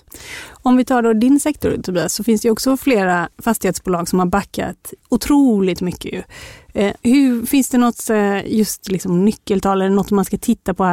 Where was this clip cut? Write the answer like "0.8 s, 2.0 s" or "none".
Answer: 3.3 s, 5.0 s, 7.0 s